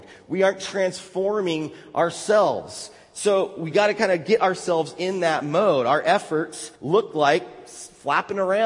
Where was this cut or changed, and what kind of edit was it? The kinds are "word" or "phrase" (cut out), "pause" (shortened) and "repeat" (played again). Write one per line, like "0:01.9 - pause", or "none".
0:06.8 - pause